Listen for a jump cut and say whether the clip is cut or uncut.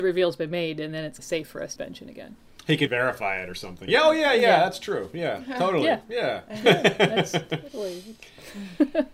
cut